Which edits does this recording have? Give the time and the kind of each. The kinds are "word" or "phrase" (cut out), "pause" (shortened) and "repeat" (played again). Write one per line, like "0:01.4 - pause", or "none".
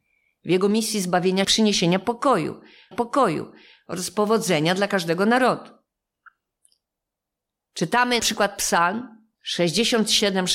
0:01.4 - phrase
0:02.9 - repeat
0:08.2 - word
0:09.3 - pause